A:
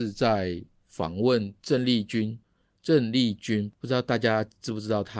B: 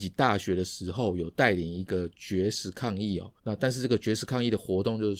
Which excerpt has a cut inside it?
B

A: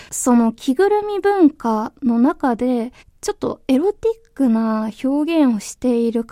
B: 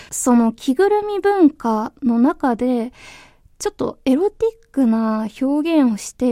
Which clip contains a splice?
A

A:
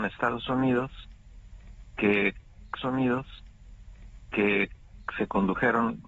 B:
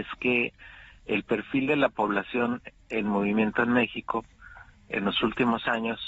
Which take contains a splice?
A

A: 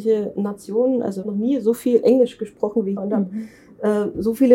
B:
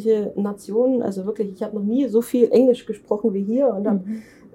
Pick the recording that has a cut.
A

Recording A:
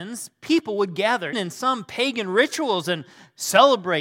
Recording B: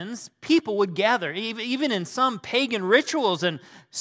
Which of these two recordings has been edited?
A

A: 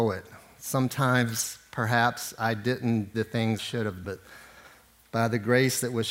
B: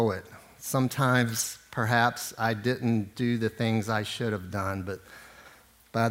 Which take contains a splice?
A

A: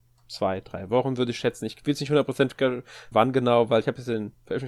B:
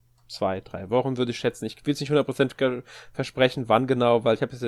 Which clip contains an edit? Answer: A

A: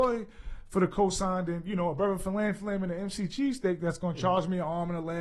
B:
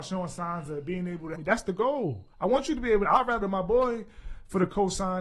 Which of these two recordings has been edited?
B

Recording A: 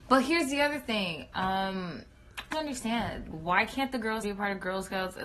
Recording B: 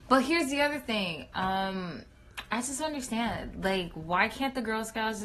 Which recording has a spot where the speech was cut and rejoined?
A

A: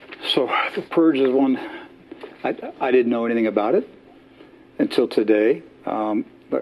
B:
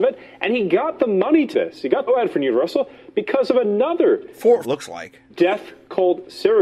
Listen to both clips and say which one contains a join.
B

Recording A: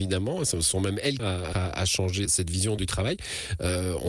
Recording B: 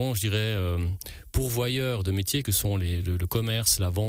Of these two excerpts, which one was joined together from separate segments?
A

